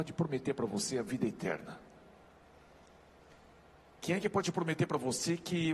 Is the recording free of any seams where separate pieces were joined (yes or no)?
yes